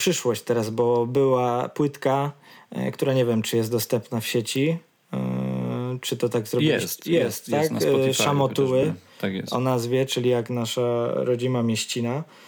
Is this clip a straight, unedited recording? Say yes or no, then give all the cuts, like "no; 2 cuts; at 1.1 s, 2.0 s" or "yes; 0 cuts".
yes; 0 cuts